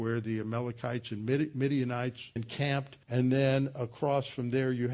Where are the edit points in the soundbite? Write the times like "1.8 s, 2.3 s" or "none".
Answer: 2.4 s, 3.0 s